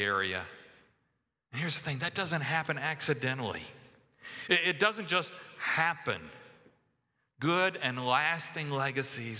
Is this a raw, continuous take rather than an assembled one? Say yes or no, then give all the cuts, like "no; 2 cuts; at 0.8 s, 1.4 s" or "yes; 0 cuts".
yes; 0 cuts